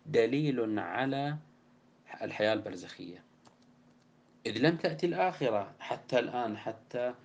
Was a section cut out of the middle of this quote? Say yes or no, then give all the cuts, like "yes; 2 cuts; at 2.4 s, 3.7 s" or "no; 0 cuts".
no; 0 cuts